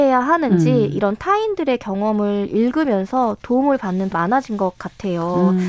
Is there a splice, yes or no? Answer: yes